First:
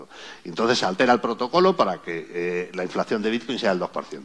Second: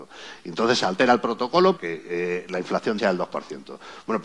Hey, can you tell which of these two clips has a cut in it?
second; 2 cuts; at 1.8 s, 3.0 s

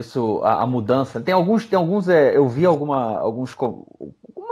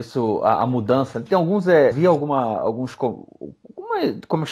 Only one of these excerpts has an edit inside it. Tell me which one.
second; 2 cuts; at 1.3 s, 1.9 s

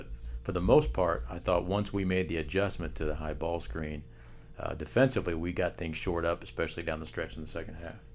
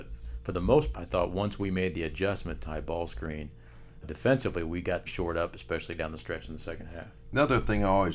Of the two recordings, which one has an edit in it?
second; 4 cuts; at 0.9 s, 2.6 s, 4.0 s, 5.1 s

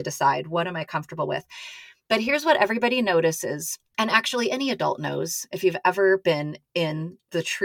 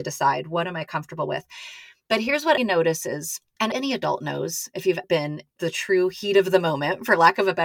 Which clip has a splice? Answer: second; 4 cuts; at 2.6 s, 3.7 s, 5.0 s, 5.5 s

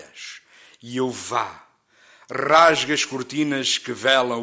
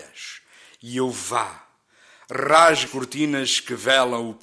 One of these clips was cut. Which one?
second; 1 cut; at 2.9 s

